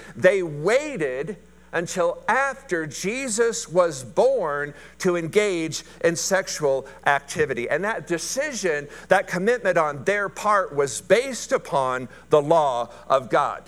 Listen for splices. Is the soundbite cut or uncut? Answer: uncut